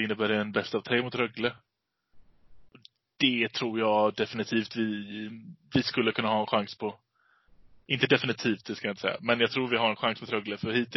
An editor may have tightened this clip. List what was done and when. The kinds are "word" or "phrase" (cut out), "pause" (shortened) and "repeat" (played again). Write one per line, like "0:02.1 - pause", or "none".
none